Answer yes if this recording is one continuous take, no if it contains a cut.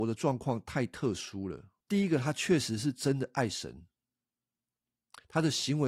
no